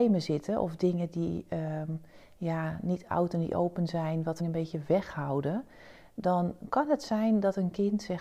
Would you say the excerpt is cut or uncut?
cut